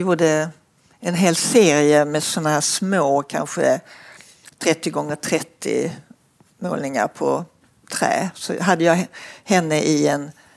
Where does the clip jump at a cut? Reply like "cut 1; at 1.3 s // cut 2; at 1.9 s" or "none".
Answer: none